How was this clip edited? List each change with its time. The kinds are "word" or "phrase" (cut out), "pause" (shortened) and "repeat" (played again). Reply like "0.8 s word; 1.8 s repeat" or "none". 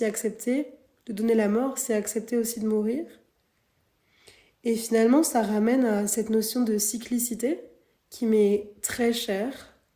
none